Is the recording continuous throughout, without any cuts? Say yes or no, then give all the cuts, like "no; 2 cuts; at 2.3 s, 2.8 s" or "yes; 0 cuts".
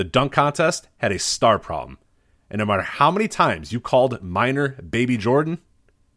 yes; 0 cuts